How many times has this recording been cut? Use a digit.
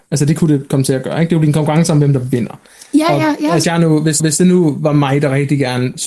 2